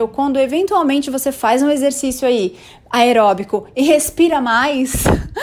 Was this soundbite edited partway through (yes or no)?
no